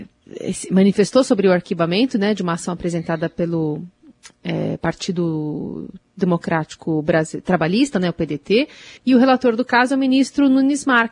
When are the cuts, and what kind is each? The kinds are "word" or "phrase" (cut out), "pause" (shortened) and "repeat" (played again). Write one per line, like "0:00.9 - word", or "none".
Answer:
0:09.0 - pause